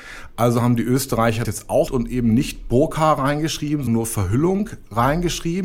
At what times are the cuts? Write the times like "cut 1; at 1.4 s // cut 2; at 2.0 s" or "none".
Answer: cut 1; at 1.4 s // cut 2; at 1.9 s // cut 3; at 3.9 s